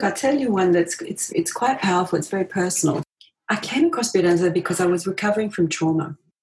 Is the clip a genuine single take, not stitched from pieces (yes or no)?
no